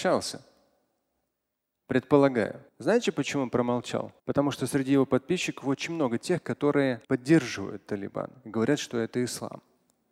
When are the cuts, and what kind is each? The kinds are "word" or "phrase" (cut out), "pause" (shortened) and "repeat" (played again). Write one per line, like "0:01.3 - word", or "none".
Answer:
0:02.7 - pause
0:04.2 - pause
0:07.0 - pause